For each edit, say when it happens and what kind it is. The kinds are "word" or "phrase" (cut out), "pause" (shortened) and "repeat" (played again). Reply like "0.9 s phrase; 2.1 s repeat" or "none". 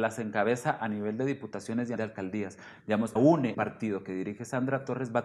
2.0 s word; 3.2 s word; 3.5 s word